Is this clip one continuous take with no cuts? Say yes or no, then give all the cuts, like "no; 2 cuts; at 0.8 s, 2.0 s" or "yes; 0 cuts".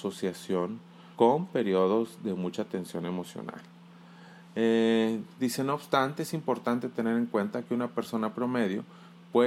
no; 2 cuts; at 1.1 s, 5.3 s